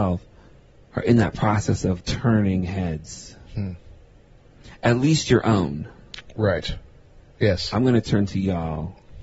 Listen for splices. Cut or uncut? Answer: cut